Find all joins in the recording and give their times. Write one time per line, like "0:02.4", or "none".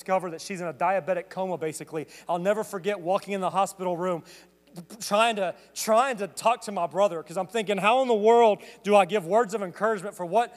none